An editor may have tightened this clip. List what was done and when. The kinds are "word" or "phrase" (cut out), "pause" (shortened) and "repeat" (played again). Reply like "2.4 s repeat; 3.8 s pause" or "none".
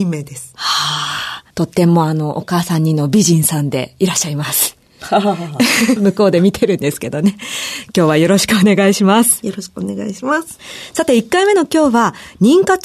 1.5 s pause; 6.0 s word